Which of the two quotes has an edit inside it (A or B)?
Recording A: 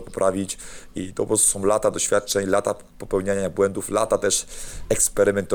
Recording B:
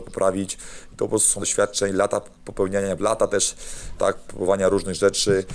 B